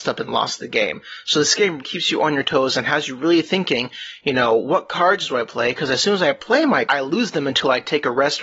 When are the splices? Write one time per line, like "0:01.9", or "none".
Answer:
0:01.8
0:06.9